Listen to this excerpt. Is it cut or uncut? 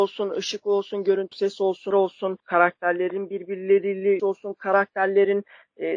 cut